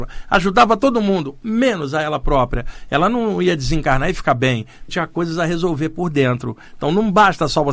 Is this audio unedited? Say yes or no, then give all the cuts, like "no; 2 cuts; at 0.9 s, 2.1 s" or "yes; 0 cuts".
no; 1 cut; at 4.9 s